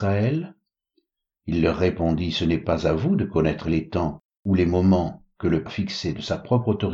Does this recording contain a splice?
yes; 1 cut; at 5.7 s

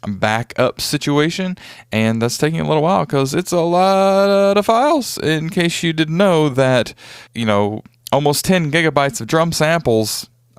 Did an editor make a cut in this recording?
yes; 2 cuts; at 7.3 s, 7.9 s

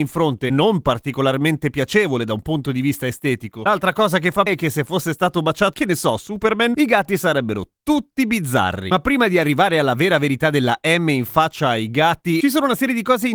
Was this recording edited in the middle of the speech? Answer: yes; 2 cuts; at 4.5 s, 5.7 s

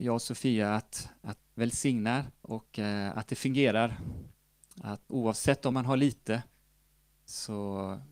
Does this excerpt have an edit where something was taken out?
yes; 4 cuts; at 1.4 s, 2.3 s, 5.1 s, 5.7 s

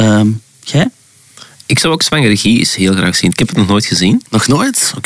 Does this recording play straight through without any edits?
yes; 0 cuts

